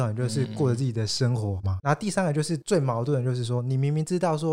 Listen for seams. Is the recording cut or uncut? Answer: cut